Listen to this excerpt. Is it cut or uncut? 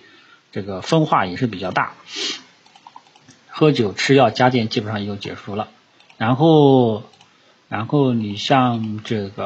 uncut